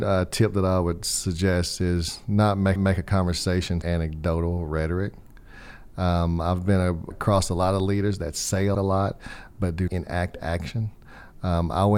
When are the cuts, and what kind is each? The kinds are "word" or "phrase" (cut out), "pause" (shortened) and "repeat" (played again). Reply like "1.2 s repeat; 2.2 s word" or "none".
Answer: 2.8 s repeat; 3.8 s word; 7.1 s word; 8.7 s phrase; 9.9 s word